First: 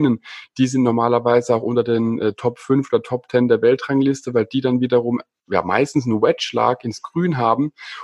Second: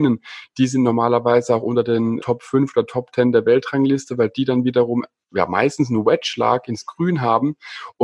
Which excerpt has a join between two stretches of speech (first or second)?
second